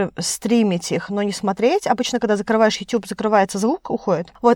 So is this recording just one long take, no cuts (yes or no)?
yes